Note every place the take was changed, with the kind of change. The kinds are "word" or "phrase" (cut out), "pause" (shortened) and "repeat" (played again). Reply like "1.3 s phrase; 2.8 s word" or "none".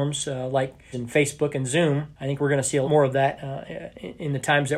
0.9 s word; 2.1 s pause; 2.8 s word

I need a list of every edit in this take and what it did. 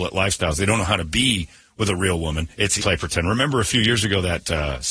2.8 s phrase

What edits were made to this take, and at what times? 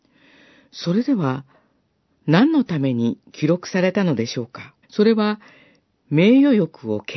4.8 s pause

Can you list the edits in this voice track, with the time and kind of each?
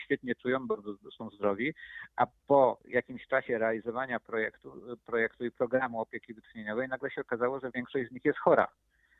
2.8 s pause

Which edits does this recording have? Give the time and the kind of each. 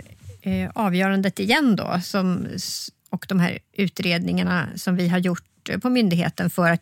3.0 s pause; 3.7 s pause

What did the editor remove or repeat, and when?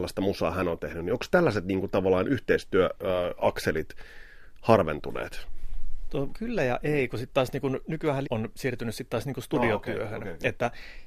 6.3 s word; 8.2 s word

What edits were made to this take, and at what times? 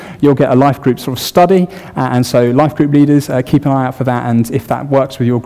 none

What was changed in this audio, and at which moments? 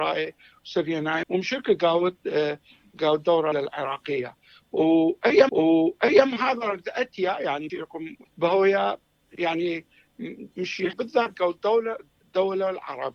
1.2 s phrase; 3.5 s word; 5.5 s repeat; 7.7 s word; 8.3 s word; 10.5 s word; 10.9 s word

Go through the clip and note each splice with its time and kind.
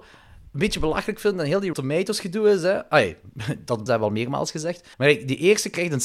1.7 s word; 3.9 s phrase; 4.9 s pause

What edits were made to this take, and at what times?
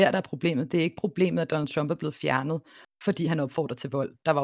none

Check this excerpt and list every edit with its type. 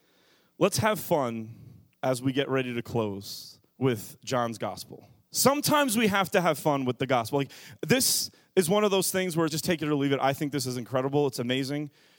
3.7 s pause; 9.5 s word

